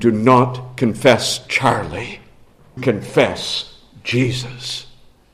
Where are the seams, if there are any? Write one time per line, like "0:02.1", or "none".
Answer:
0:02.8